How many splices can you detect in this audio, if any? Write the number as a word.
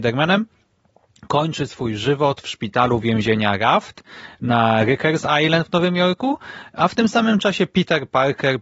zero